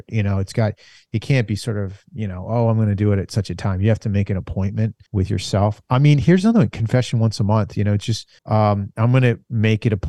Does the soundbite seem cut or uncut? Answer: cut